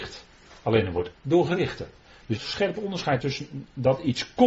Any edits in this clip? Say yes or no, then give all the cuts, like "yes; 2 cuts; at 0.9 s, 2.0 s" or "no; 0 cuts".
yes; 3 cuts; at 1.1 s, 2.4 s, 3.2 s